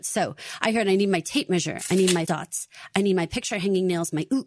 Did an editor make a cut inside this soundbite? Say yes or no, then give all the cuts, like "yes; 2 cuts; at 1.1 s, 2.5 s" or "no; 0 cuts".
yes; 1 cut; at 2.3 s